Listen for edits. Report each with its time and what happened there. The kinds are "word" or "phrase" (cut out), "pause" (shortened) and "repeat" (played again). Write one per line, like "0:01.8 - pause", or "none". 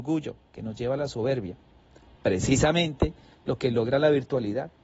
none